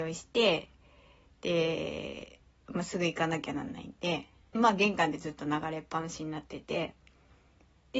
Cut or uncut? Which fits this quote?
cut